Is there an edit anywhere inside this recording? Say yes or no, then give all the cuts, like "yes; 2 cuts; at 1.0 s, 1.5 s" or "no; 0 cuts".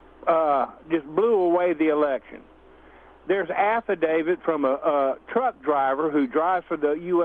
no; 0 cuts